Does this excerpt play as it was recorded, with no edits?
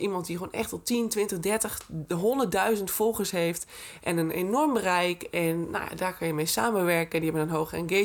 yes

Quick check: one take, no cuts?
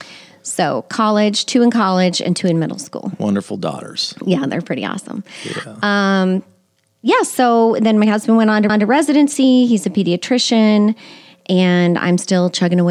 no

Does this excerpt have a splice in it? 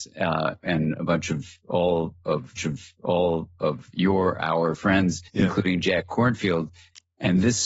yes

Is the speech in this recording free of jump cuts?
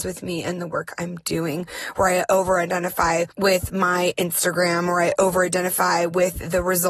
yes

